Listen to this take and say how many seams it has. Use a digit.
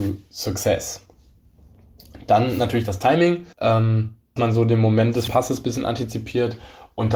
3